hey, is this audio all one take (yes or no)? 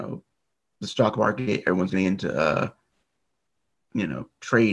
yes